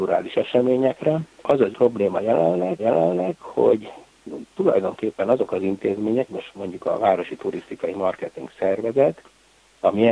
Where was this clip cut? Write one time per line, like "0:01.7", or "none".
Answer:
0:01.7
0:02.8
0:06.3